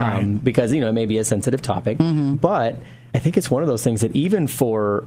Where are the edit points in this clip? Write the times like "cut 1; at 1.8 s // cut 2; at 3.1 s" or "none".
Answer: cut 1; at 3.1 s